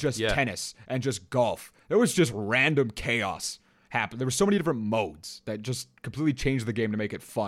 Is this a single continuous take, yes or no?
yes